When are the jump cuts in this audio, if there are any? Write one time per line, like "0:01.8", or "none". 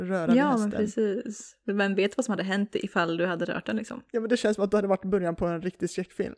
none